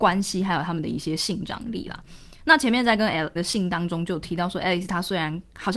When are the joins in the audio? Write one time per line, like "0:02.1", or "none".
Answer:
0:03.4

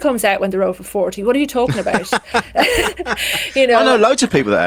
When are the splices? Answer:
none

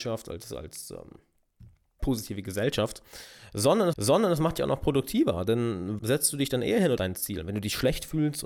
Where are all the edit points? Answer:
0:02.0
0:03.9
0:06.0
0:07.0

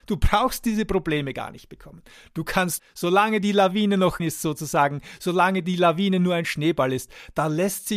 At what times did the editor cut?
0:02.8
0:04.2

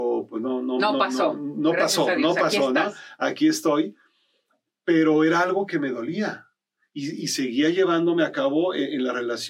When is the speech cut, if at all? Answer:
none

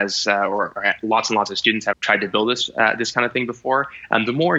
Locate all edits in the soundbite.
0:01.9

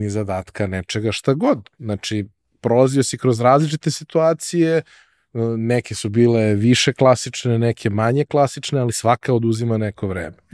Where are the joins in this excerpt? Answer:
none

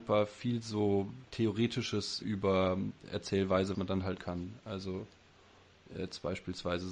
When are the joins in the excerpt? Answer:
0:02.2
0:03.7
0:04.2

